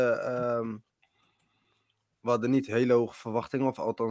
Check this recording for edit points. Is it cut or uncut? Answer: uncut